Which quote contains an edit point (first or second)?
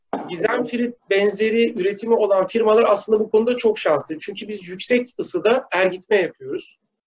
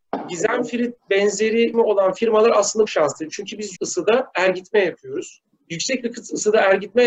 second